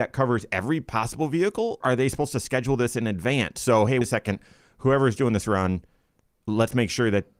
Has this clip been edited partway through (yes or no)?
yes